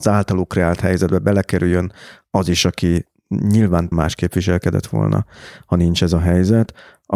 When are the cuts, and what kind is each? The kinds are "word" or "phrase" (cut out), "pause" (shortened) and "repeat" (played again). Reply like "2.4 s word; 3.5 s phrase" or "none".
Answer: 3.9 s word